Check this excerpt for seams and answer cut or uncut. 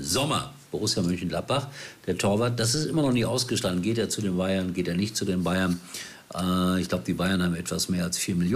uncut